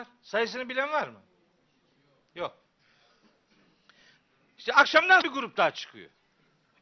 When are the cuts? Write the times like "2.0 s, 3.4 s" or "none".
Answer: 5.2 s